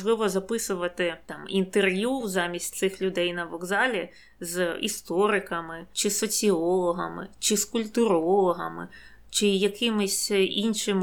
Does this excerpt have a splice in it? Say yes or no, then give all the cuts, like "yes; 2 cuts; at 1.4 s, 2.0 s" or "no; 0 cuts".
no; 0 cuts